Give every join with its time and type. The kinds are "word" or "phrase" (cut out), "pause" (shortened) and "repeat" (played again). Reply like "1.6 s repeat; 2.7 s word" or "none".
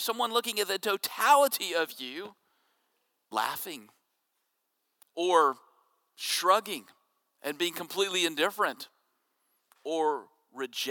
3.3 s word